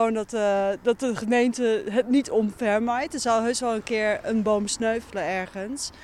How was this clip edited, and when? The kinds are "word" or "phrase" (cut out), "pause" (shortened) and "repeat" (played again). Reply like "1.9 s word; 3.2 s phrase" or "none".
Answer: none